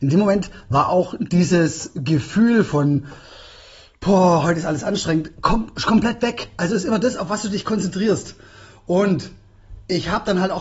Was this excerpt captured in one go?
yes; 0 cuts

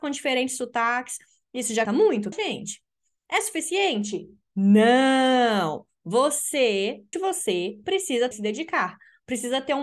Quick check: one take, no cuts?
no; 4 cuts; at 1.9 s, 2.3 s, 7.1 s, 8.3 s

